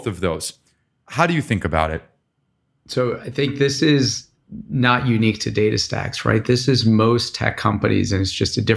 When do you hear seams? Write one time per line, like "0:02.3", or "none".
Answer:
none